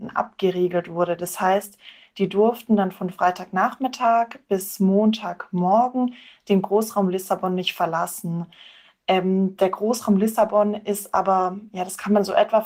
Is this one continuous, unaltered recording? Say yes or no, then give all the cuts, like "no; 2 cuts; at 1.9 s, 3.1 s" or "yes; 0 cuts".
yes; 0 cuts